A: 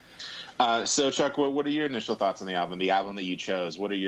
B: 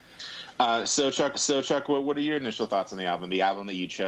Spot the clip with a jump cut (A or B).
B